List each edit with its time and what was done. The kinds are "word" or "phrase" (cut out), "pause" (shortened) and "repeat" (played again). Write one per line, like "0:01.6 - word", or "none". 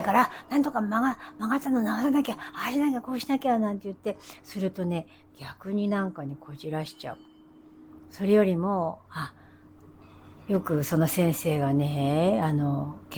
none